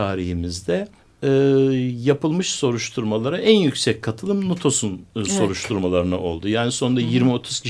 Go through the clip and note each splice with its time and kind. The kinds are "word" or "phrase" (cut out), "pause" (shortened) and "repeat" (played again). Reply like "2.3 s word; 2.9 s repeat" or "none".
1.0 s pause